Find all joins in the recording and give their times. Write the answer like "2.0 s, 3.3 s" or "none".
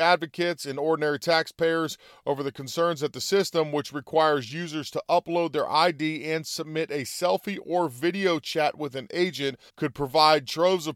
9.7 s